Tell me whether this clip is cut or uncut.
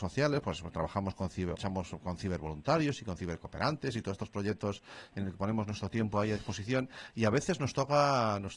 cut